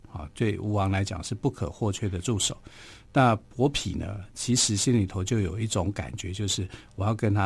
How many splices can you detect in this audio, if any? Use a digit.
0